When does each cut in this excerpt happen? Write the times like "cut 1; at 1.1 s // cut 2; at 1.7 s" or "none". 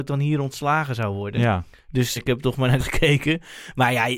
cut 1; at 2.2 s // cut 2; at 2.8 s